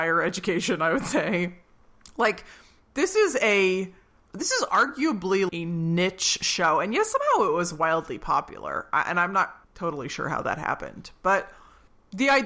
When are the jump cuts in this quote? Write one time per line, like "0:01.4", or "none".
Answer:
0:05.5
0:09.6